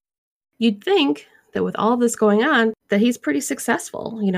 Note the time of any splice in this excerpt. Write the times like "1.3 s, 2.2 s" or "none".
2.8 s